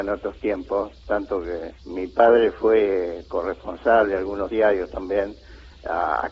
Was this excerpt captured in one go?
no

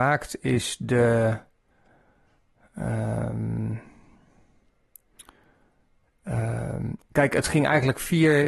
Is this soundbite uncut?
yes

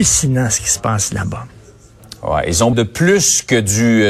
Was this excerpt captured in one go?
no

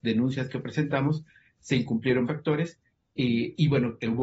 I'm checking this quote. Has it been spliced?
yes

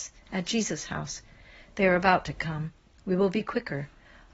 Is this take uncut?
yes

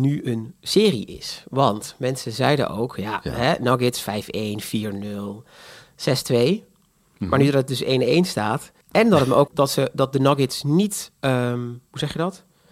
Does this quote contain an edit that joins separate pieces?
yes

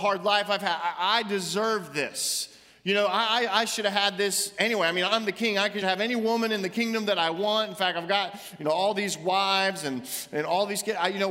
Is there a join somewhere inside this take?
yes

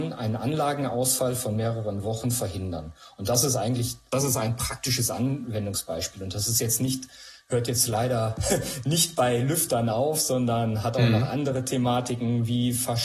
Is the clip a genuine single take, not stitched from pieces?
no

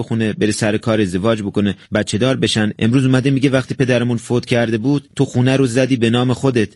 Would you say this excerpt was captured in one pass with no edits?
yes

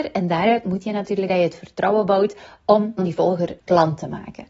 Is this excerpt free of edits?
no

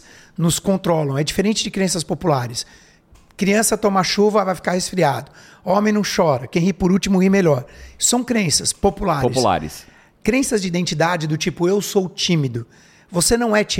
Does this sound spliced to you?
no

